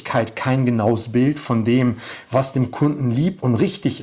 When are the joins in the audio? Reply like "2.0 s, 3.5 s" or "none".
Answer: none